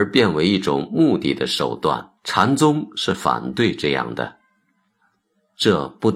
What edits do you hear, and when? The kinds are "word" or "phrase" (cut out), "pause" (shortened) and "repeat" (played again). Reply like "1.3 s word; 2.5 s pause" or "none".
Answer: 2.2 s pause